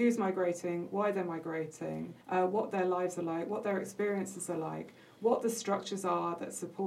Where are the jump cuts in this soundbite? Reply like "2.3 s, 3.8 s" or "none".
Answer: 2.2 s